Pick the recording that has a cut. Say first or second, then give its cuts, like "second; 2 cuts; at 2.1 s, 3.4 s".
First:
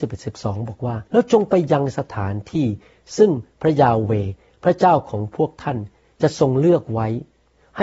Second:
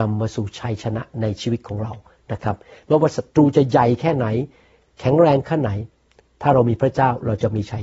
first; 1 cut; at 1.1 s